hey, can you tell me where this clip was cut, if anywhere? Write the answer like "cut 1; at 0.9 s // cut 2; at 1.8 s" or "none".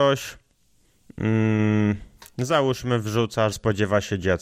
cut 1; at 3.5 s